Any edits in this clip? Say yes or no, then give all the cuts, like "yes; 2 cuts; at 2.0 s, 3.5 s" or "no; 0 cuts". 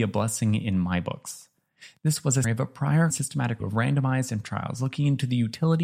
yes; 4 cuts; at 2.4 s, 3.1 s, 3.6 s, 4.4 s